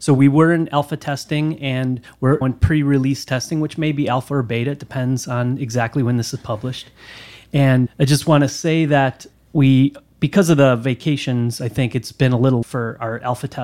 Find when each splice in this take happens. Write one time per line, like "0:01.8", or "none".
0:02.4
0:07.9
0:09.3
0:12.6